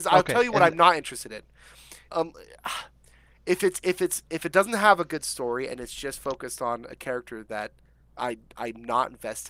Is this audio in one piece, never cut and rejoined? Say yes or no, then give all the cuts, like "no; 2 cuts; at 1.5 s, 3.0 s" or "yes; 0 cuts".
no; 2 cuts; at 2.0 s, 8.0 s